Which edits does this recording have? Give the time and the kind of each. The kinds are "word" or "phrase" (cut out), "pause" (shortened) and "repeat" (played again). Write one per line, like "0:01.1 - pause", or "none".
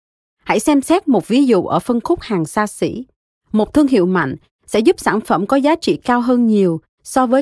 none